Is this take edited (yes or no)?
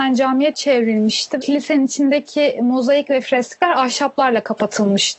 yes